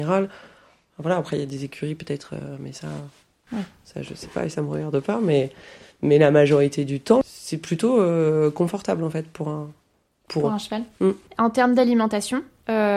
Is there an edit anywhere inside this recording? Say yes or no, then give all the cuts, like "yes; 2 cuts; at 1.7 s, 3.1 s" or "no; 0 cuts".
no; 0 cuts